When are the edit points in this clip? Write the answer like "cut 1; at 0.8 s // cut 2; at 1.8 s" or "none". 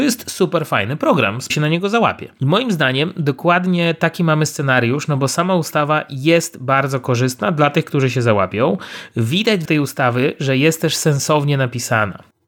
cut 1; at 1.5 s // cut 2; at 9.6 s

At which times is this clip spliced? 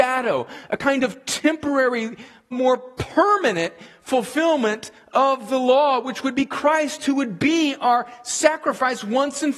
cut 1; at 2.5 s

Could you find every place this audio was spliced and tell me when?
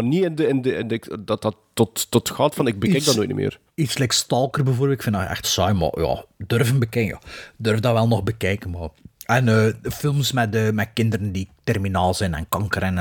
cut 1; at 3.7 s // cut 2; at 5.4 s // cut 3; at 9.1 s

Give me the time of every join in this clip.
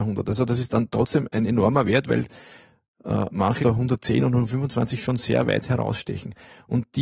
cut 1; at 3.6 s

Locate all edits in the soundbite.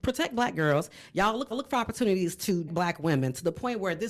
cut 1; at 1.5 s // cut 2; at 2.7 s

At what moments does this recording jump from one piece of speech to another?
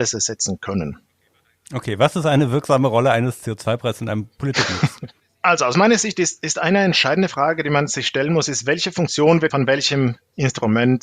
cut 1; at 9.5 s

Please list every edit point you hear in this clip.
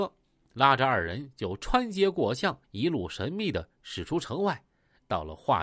cut 1; at 2.6 s

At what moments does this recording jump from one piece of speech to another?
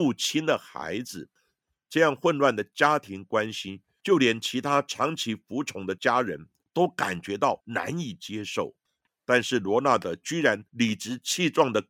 none

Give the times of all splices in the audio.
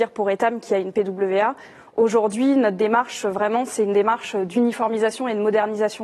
none

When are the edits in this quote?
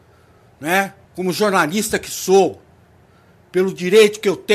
cut 1; at 1.0 s

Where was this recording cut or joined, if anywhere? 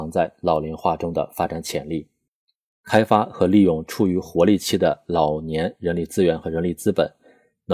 none

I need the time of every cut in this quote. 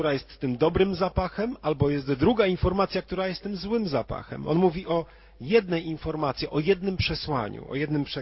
none

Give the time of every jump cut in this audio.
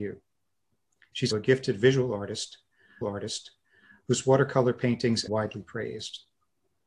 cut 1; at 1.3 s // cut 2; at 3.0 s // cut 3; at 5.3 s

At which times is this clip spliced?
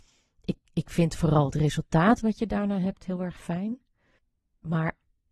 cut 1; at 4.2 s

